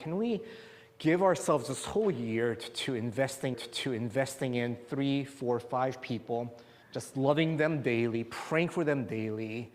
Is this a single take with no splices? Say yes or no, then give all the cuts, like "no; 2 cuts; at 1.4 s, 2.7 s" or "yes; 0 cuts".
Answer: no; 2 cuts; at 3.5 s, 6.8 s